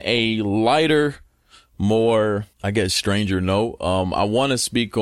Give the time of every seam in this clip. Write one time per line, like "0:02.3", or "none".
0:02.5